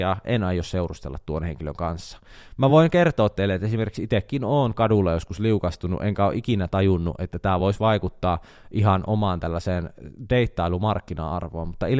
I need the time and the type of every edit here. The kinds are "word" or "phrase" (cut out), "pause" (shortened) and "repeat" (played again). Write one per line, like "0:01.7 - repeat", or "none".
none

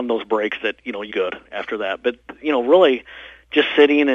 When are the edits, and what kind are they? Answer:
0:01.1 - phrase
0:01.4 - pause

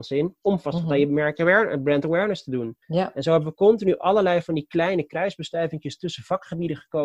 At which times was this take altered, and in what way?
0:02.8 - pause

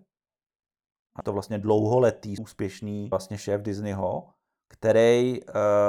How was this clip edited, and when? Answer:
0:01.2 - word
0:02.4 - word
0:03.1 - word

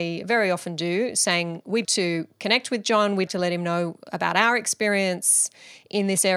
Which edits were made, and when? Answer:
0:01.8 - word
0:03.3 - word

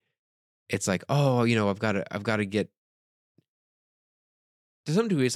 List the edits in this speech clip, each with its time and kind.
none

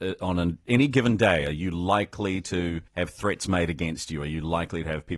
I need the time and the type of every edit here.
0:02.9 - pause

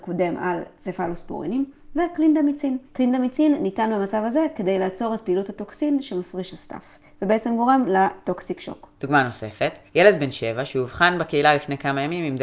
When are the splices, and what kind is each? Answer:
0:02.8 - pause
0:08.9 - pause
0:09.9 - pause

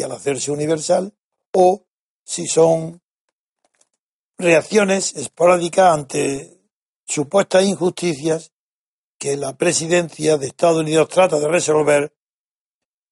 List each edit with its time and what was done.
none

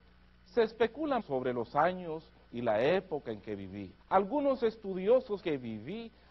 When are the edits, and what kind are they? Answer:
0:01.2 - word
0:04.0 - pause
0:05.4 - word

